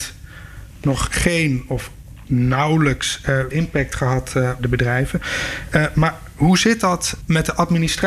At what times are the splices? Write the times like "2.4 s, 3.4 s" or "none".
3.5 s, 4.6 s